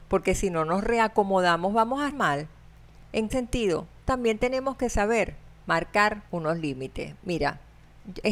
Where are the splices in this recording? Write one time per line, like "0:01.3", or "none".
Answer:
0:02.1
0:03.3
0:06.3